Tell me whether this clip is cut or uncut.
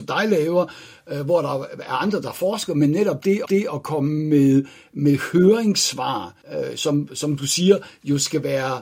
cut